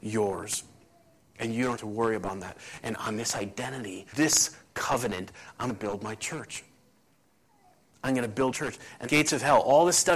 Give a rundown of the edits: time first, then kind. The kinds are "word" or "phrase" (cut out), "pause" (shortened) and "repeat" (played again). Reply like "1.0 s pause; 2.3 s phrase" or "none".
1.8 s word; 4.1 s word; 5.7 s word; 8.5 s word; 9.1 s word